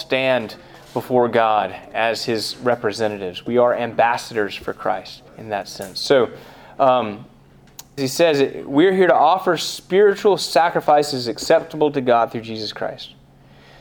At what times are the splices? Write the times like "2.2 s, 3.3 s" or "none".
5.3 s, 8.0 s